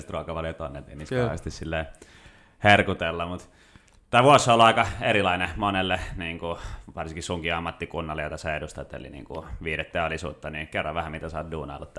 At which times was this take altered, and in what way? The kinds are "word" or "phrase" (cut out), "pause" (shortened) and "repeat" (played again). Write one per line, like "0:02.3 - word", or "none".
none